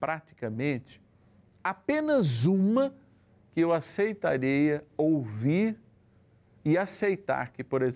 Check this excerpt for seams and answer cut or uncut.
uncut